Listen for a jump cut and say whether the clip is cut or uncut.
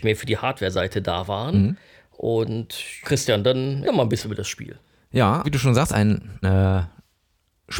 cut